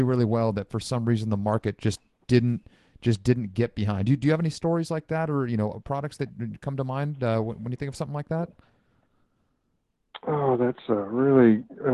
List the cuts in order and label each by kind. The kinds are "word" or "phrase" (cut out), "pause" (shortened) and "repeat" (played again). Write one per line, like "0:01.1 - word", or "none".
none